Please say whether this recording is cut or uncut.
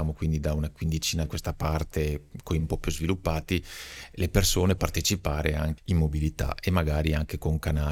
cut